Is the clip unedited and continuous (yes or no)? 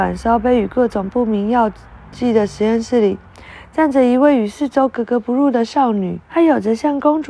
no